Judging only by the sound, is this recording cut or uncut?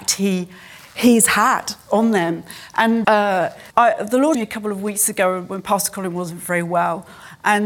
cut